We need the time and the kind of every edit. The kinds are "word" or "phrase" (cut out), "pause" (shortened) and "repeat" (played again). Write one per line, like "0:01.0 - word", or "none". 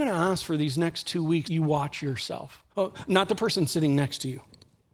0:01.4 - word
0:02.7 - pause